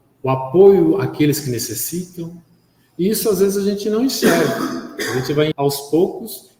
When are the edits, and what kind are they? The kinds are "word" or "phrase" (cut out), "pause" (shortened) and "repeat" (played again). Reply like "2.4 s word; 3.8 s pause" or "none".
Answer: 5.5 s word